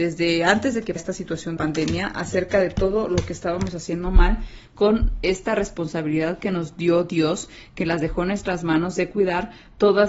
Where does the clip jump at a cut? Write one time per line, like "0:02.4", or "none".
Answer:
0:01.0
0:01.6